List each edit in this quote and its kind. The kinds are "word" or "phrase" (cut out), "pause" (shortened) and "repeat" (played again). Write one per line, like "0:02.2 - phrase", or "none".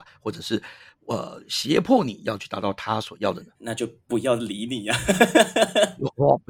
0:03.6 - pause